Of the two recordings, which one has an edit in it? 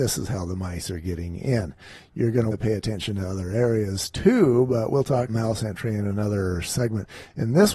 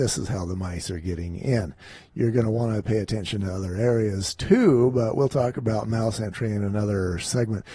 first; 2 cuts; at 2.5 s, 5.3 s

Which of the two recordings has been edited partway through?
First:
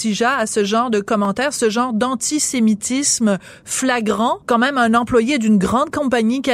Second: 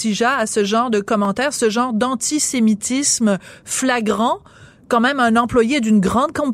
first; 1 cut; at 4.4 s

